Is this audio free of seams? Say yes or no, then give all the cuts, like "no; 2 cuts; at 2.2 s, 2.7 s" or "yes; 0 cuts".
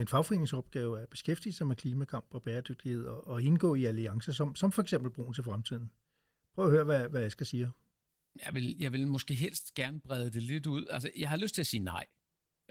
yes; 0 cuts